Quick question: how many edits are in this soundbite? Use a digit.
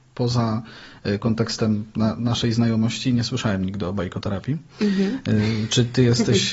0